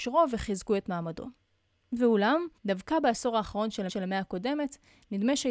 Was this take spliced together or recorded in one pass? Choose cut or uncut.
cut